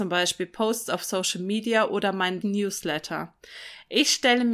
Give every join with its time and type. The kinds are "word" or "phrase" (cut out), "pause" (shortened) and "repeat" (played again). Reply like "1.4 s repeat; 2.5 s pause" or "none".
2.4 s word